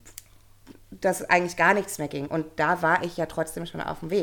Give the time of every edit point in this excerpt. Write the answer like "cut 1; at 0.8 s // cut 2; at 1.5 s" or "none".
none